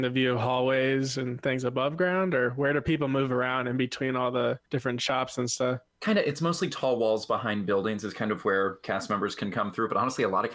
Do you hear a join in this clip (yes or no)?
yes